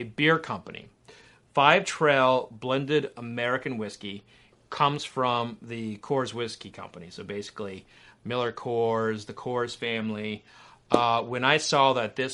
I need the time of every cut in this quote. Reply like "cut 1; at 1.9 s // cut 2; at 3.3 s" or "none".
none